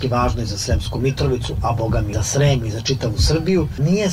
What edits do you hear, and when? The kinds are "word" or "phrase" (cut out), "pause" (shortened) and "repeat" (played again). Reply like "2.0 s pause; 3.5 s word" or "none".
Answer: none